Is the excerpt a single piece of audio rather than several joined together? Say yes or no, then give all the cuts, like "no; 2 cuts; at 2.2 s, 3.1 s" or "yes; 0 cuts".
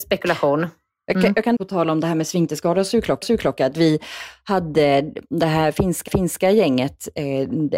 no; 3 cuts; at 1.6 s, 3.2 s, 6.1 s